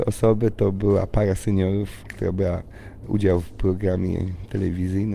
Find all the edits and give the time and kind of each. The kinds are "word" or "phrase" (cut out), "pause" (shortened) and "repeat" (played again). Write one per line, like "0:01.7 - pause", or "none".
none